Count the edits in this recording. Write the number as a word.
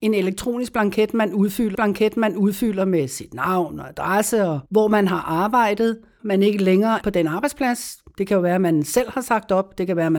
four